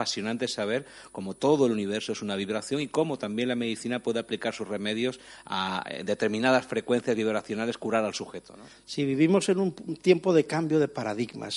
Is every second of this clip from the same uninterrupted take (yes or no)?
yes